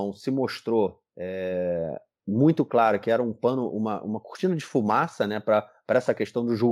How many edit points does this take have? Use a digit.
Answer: 0